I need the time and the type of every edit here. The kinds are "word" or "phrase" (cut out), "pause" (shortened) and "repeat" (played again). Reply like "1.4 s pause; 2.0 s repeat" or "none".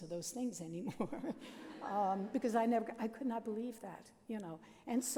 none